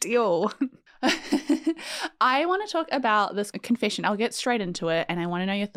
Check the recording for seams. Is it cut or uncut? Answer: uncut